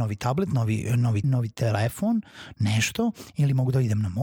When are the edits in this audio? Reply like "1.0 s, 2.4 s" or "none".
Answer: 1.2 s